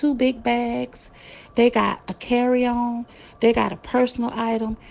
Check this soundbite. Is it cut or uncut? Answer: uncut